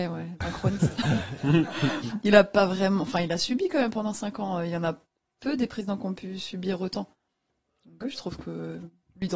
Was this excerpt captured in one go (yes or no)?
no